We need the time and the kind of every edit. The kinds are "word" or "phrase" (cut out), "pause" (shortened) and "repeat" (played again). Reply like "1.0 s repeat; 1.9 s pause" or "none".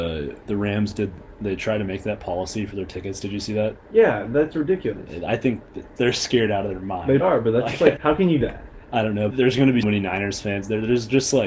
6.0 s word; 7.2 s word; 8.0 s word; 8.4 s word; 9.3 s word; 9.8 s word